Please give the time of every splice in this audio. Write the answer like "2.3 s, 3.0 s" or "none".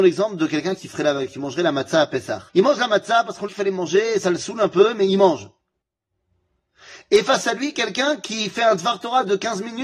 2.5 s, 3.5 s